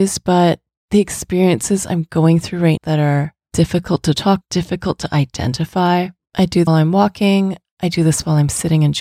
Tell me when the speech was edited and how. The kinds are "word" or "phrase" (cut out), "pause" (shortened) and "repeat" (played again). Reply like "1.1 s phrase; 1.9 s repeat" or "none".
2.8 s word; 4.4 s word; 6.7 s phrase